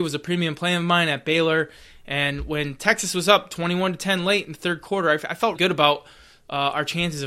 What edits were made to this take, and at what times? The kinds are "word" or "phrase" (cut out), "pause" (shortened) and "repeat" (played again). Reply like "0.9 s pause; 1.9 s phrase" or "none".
5.5 s word